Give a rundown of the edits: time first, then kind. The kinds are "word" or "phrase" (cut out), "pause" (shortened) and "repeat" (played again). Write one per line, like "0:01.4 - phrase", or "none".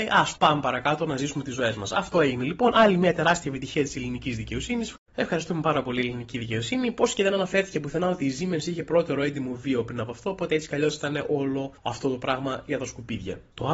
none